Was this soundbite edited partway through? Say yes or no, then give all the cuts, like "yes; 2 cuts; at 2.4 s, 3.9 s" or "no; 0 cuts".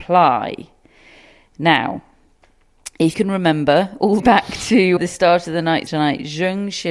yes; 4 cuts; at 3.1 s, 4.2 s, 5.0 s, 5.9 s